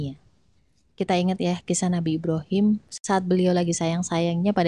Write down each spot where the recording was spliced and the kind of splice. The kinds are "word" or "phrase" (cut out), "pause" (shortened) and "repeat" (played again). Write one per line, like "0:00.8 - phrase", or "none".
none